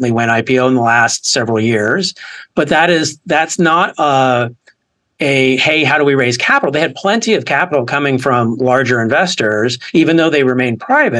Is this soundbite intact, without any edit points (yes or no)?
yes